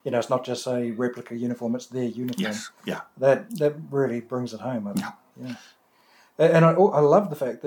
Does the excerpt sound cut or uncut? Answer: uncut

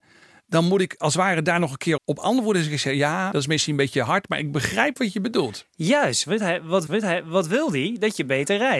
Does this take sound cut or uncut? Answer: cut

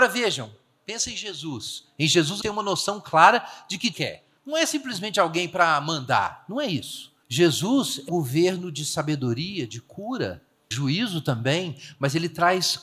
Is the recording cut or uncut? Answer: cut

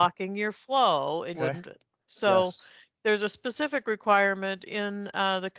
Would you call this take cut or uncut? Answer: cut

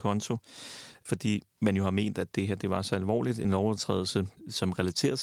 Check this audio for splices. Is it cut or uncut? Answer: uncut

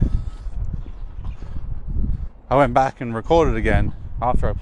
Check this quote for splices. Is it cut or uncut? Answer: uncut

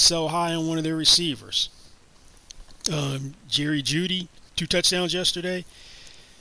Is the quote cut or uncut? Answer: cut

